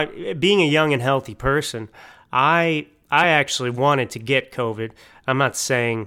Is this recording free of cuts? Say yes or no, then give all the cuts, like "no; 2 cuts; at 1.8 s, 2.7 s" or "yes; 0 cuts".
yes; 0 cuts